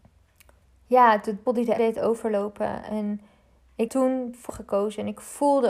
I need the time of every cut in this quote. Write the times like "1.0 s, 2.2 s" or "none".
1.5 s, 1.8 s, 3.9 s, 4.5 s